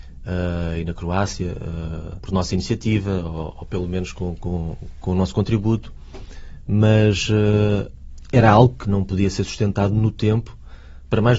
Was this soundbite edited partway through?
no; 0 cuts

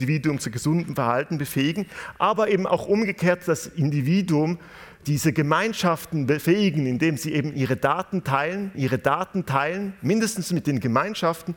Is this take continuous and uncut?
no; 1 cut; at 8.7 s

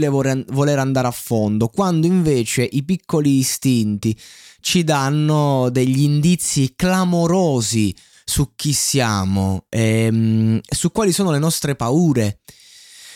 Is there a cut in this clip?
no; 0 cuts

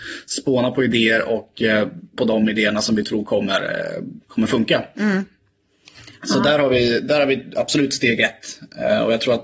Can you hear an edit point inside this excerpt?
yes; 1 cut; at 2.2 s

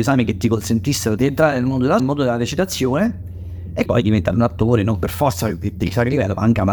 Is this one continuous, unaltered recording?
no; 3 cuts; at 1.2 s, 2.0 s, 3.9 s

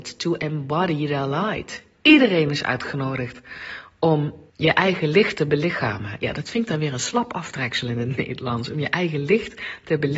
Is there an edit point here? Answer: yes; 1 cut; at 4.5 s

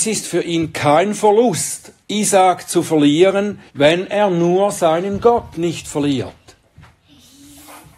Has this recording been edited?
yes; 2 cuts; at 2.0 s, 3.7 s

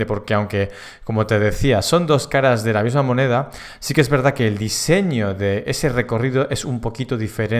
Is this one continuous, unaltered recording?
yes; 0 cuts

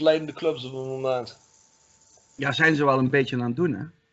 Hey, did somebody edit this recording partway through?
no; 0 cuts

